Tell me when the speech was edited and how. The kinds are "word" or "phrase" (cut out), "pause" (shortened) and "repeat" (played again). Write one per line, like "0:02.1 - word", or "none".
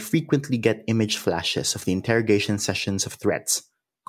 none

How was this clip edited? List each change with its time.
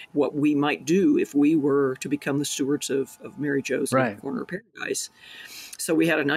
none

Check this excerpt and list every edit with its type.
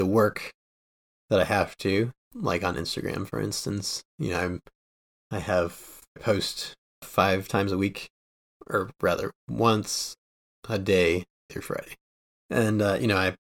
0:02.2 - word
0:06.2 - word
0:07.0 - word
0:11.5 - word

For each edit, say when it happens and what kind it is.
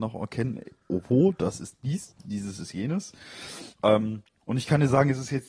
0:03.7 - pause

